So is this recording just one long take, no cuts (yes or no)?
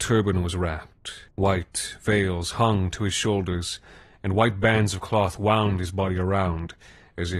no